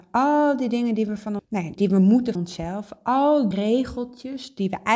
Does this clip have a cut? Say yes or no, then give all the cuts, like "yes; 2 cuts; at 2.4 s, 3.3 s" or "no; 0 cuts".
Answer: yes; 4 cuts; at 1.4 s, 1.8 s, 2.4 s, 3.5 s